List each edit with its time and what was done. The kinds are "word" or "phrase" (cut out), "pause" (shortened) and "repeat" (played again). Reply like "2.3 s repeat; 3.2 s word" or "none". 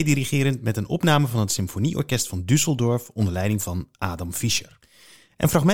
none